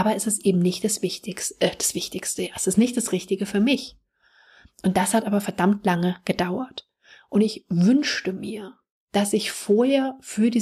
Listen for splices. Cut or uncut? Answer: uncut